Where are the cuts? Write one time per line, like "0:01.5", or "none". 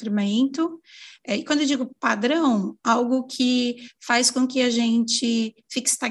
none